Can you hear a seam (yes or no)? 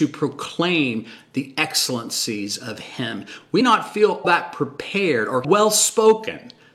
yes